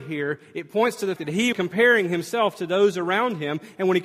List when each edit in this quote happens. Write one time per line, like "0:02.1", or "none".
0:01.2
0:01.5